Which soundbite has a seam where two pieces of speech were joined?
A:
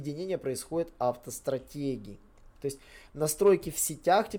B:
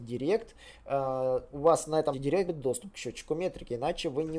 B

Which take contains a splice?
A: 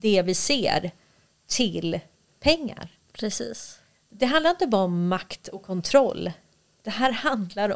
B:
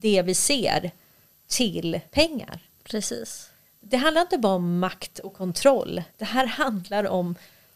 B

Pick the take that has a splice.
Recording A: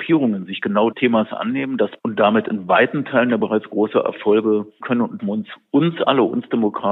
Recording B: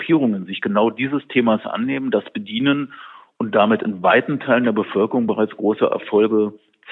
A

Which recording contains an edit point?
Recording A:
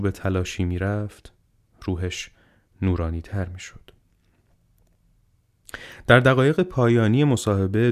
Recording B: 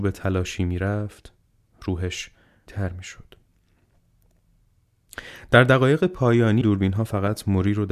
B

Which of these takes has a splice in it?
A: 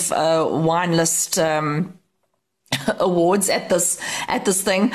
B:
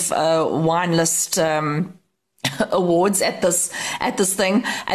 B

